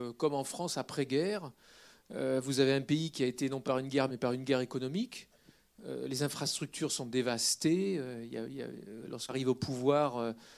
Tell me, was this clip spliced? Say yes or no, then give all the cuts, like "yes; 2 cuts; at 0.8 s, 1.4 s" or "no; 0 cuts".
yes; 3 cuts; at 3.6 s, 4.1 s, 9.3 s